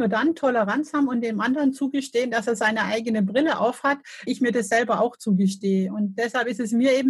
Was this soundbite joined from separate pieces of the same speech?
yes; 1 cut; at 4.3 s

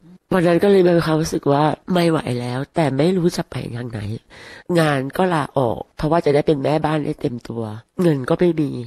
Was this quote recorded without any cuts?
no; 1 cut; at 1.8 s

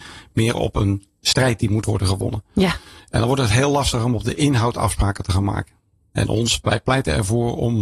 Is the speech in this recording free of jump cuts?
yes; 0 cuts

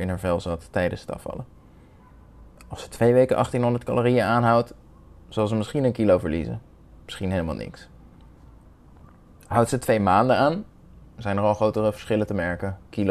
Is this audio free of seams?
yes; 0 cuts

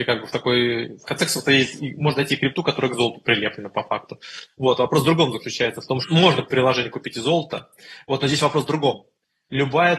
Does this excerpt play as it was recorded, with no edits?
no; 2 cuts; at 1.8 s, 6.0 s

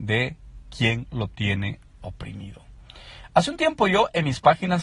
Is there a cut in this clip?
no; 0 cuts

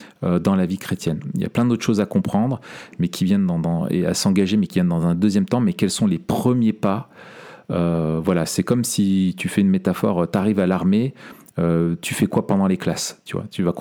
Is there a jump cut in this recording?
no; 0 cuts

